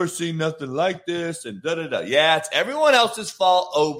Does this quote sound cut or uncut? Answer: uncut